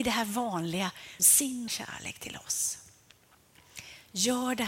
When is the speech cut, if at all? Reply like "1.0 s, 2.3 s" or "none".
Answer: 1.2 s, 1.7 s